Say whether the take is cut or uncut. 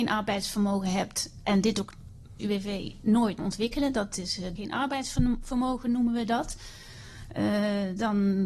cut